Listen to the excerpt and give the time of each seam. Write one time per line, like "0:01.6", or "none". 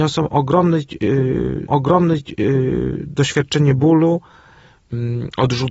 0:01.7